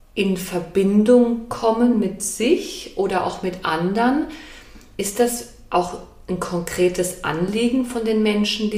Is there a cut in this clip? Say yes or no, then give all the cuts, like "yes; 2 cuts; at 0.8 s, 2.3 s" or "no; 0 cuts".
no; 0 cuts